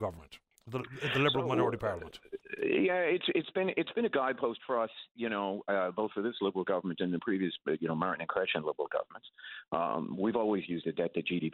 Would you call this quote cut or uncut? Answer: uncut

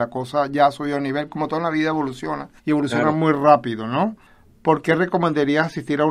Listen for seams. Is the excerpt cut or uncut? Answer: cut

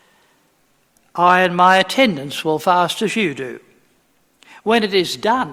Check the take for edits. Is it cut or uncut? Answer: uncut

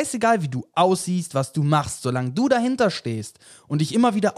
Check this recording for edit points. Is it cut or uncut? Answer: uncut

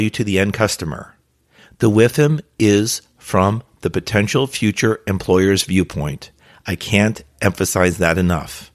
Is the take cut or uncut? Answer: uncut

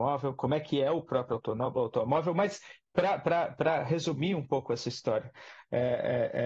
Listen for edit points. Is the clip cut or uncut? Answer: uncut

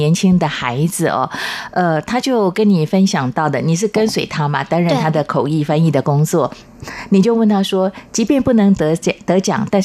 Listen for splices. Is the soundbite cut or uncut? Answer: uncut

